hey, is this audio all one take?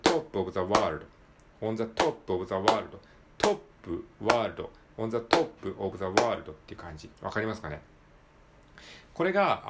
no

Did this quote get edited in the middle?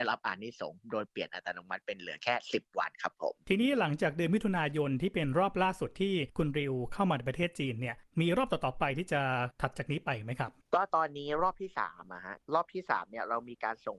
yes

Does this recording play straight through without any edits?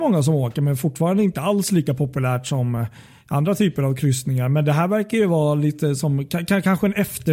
yes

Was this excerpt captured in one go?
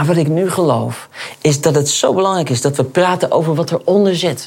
yes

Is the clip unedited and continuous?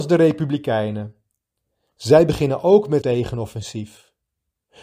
no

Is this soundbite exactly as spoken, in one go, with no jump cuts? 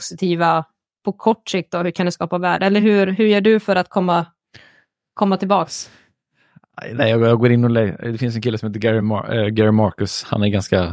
yes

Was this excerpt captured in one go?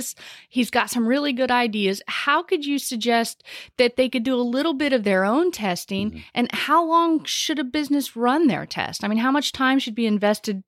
yes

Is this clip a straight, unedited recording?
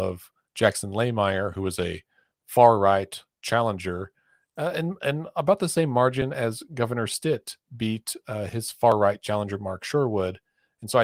yes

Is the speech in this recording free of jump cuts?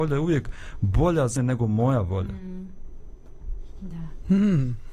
no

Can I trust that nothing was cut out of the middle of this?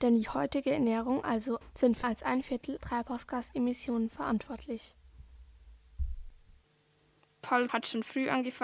no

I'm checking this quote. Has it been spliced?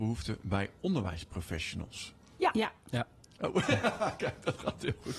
no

